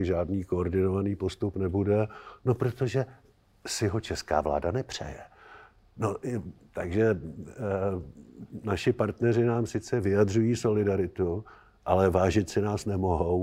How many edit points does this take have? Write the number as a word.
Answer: zero